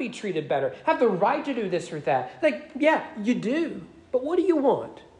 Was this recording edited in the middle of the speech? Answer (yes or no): no